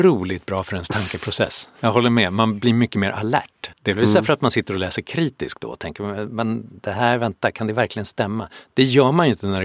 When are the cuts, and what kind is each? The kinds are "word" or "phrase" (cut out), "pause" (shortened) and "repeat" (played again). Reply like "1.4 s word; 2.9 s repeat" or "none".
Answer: 3.7 s pause